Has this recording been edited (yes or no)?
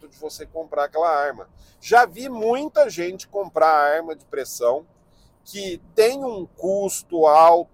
no